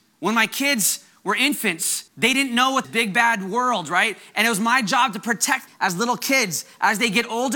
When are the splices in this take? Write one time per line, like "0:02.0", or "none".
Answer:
0:02.1
0:02.8
0:05.7